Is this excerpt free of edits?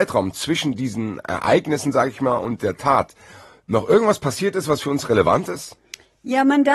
yes; 0 cuts

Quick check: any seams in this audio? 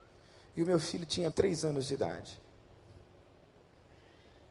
yes; 1 cut; at 1.3 s

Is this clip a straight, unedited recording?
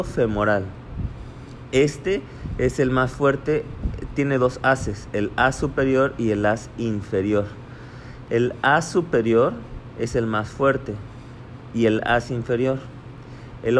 yes; 0 cuts

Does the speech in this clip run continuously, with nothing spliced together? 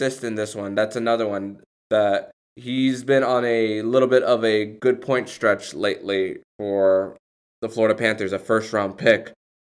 no; 1 cut; at 2.4 s

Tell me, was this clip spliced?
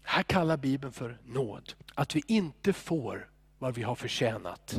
yes; 1 cut; at 1.8 s

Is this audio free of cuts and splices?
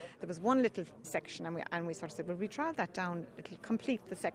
no; 1 cut; at 1.0 s

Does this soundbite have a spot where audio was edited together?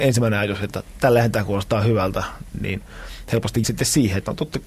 yes; 1 cut; at 3.6 s

